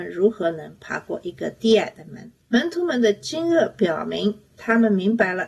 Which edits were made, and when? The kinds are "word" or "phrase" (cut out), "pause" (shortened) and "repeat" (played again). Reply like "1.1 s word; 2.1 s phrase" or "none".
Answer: 2.4 s pause